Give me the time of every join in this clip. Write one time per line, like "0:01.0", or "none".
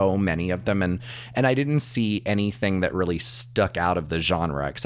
none